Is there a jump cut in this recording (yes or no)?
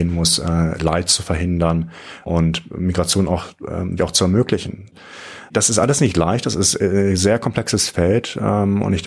yes